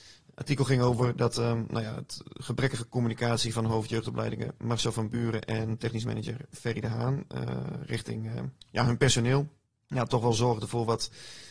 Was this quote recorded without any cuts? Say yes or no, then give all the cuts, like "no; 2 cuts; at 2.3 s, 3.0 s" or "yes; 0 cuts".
no; 2 cuts; at 8.6 s, 9.7 s